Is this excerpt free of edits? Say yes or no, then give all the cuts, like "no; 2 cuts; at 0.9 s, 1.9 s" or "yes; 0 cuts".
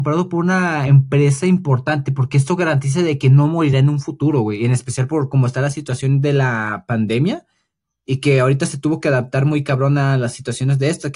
yes; 0 cuts